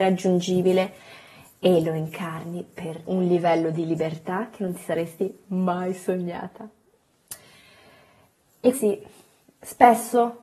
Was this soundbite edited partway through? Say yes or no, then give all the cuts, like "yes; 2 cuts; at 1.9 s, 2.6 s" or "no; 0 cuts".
yes; 2 cuts; at 3.0 s, 8.7 s